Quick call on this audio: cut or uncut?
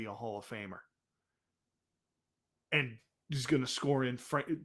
uncut